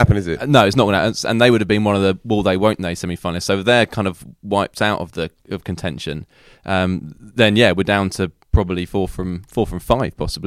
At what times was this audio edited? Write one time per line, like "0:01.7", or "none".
none